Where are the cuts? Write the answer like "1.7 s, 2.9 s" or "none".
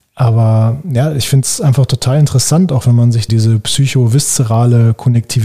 3.3 s